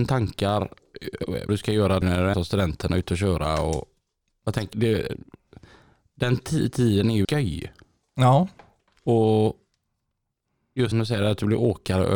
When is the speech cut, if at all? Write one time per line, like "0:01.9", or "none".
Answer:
0:01.5
0:02.0
0:02.3
0:04.7
0:07.2
0:10.9